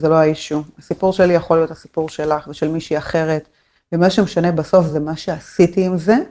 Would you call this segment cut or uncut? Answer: uncut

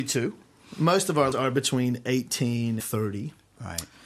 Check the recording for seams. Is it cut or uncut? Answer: cut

